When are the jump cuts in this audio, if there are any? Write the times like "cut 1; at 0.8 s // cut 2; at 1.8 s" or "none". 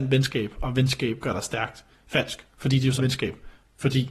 cut 1; at 3.0 s